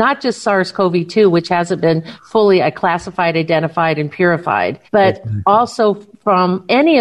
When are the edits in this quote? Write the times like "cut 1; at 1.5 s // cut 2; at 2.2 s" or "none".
cut 1; at 4.9 s